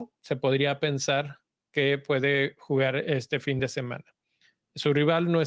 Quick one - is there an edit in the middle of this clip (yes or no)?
no